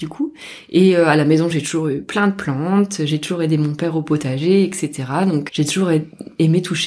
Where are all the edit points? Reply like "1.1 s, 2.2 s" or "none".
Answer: 5.5 s